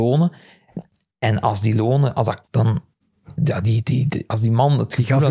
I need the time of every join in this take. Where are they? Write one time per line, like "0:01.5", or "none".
0:02.4